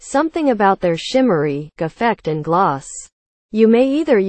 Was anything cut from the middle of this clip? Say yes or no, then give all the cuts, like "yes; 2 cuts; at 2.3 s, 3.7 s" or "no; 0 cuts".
yes; 1 cut; at 1.8 s